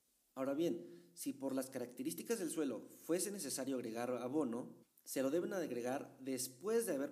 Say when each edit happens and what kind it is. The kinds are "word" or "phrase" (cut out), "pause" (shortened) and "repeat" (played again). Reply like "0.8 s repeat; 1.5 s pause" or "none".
4.8 s pause